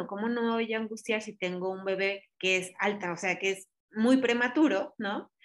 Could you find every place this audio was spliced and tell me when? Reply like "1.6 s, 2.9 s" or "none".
2.3 s